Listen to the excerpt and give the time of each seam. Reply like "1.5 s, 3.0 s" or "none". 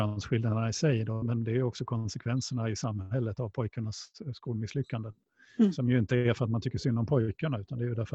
1.2 s